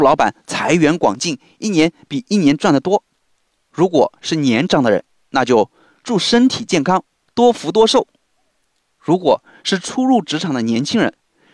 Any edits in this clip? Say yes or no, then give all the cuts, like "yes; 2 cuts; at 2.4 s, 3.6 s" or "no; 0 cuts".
no; 0 cuts